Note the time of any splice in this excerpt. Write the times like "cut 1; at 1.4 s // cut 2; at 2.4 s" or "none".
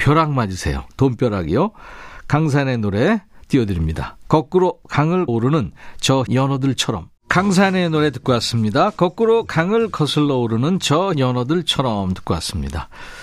cut 1; at 5.3 s // cut 2; at 6.3 s // cut 3; at 7.2 s // cut 4; at 11.1 s